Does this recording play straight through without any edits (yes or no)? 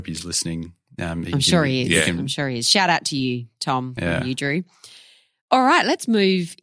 yes